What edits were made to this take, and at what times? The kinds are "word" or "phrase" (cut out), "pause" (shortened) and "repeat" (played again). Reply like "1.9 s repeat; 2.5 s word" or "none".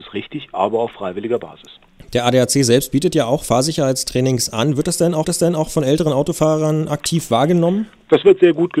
5.2 s repeat